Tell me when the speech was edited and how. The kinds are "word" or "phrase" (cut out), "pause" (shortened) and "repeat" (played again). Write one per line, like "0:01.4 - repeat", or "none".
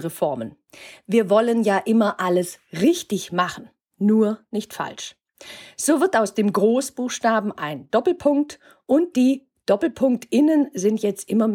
none